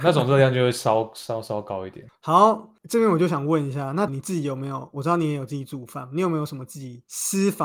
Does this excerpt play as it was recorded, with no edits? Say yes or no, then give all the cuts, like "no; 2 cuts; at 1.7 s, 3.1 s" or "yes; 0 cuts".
no; 1 cut; at 4.1 s